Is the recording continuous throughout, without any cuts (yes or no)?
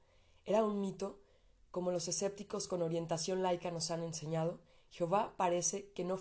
yes